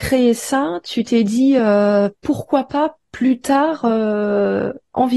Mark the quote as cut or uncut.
uncut